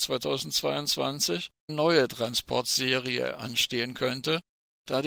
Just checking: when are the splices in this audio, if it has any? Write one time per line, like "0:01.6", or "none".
0:01.7

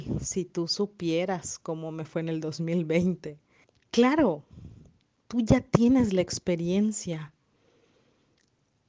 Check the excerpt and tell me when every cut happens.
0:03.6

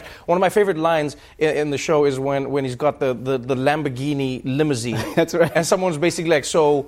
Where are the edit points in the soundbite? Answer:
none

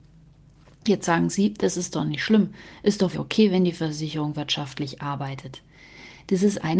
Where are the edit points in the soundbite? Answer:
0:03.1

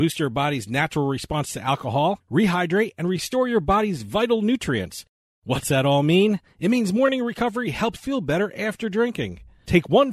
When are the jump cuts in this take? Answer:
0:08.0

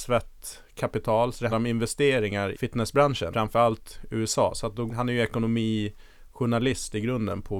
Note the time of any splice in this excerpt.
0:01.5
0:02.5
0:03.3
0:04.9

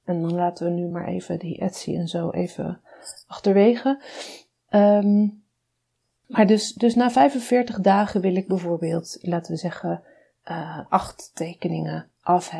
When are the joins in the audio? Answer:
none

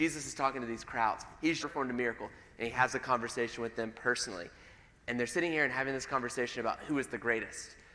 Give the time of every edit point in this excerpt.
0:01.6

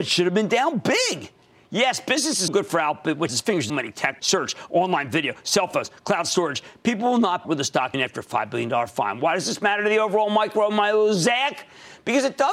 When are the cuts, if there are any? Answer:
0:02.5
0:03.3
0:03.7
0:04.2
0:07.4
0:07.9

